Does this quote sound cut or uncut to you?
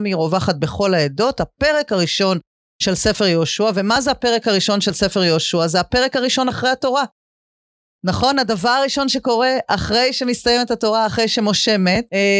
uncut